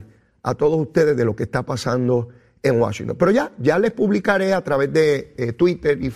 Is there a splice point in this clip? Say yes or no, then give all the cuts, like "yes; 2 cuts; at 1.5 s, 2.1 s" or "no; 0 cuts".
no; 0 cuts